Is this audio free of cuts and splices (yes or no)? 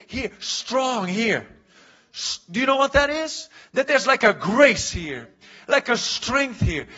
yes